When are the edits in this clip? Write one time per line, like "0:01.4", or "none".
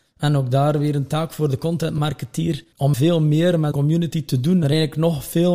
0:02.7
0:03.7
0:04.6